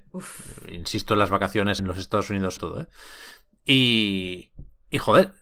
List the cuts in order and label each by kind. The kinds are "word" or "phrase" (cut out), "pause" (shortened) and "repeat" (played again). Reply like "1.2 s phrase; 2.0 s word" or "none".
1.8 s phrase; 2.6 s word